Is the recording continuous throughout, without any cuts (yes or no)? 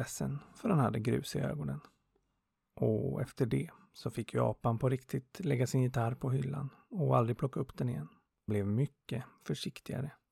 no